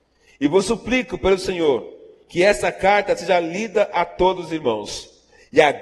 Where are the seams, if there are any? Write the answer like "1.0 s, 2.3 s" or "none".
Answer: none